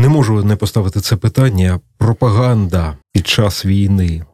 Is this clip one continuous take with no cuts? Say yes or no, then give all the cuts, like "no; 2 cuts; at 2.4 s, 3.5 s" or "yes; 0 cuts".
no; 1 cut; at 3.0 s